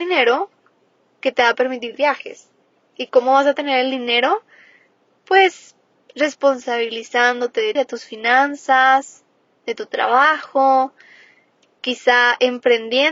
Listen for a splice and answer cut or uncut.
cut